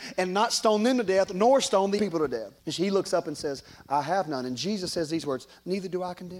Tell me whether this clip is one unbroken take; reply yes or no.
no